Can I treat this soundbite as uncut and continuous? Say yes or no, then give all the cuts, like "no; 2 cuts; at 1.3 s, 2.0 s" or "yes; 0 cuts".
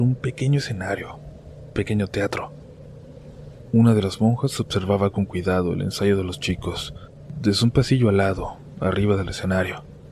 no; 1 cut; at 1.7 s